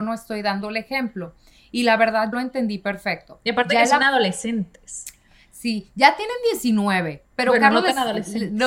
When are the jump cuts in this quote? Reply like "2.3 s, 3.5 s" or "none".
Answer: 2.3 s

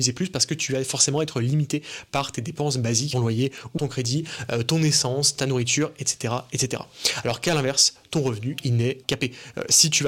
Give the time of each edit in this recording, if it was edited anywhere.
3.1 s, 3.8 s, 9.0 s

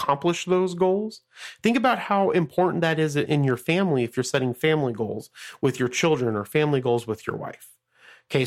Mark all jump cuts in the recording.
none

